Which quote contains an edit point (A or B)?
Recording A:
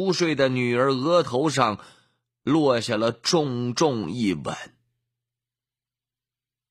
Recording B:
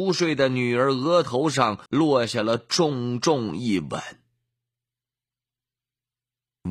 B